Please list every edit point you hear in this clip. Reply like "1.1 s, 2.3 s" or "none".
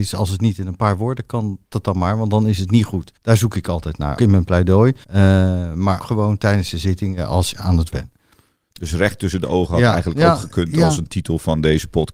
1.7 s, 3.2 s, 4.2 s, 5.0 s, 6.0 s, 7.5 s, 7.9 s